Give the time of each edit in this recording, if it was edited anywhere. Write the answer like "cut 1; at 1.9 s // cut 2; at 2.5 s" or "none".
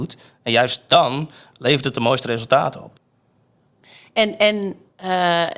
none